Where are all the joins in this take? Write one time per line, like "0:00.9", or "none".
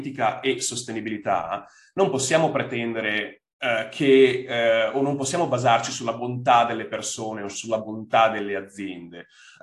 none